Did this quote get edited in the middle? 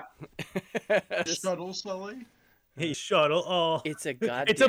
yes; 2 cuts; at 1.3 s, 2.9 s

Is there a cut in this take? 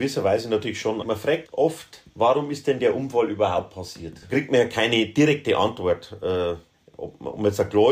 yes; 3 cuts; at 1.5 s, 2.1 s, 6.7 s

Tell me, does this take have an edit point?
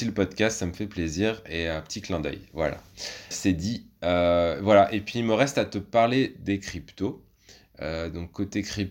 yes; 1 cut; at 3.3 s

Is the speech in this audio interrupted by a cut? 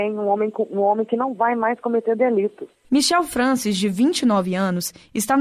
no; 0 cuts

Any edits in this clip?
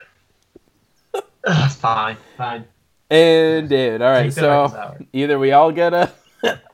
no; 0 cuts

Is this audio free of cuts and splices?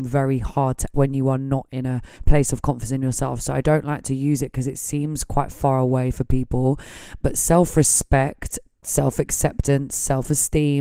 no; 2 cuts; at 0.9 s, 2.1 s

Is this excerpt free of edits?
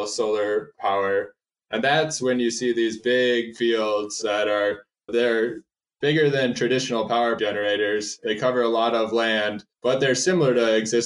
no; 3 cuts; at 5.1 s, 7.4 s, 9.7 s

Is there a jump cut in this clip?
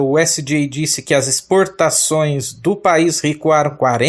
no; 0 cuts

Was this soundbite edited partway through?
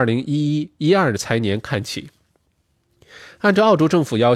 no; 0 cuts

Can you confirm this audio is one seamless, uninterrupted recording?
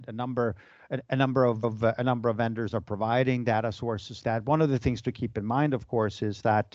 no; 2 cuts; at 1.6 s, 4.2 s

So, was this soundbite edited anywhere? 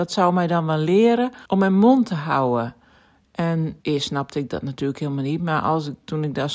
yes; 2 cuts; at 1.5 s, 3.8 s

